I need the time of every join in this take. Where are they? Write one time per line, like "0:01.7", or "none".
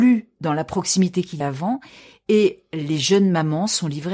0:01.4